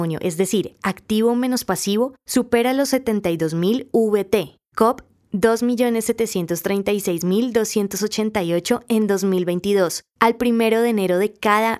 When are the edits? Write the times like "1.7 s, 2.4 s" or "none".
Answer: none